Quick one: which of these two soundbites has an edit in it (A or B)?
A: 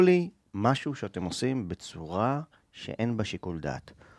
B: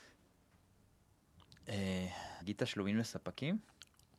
B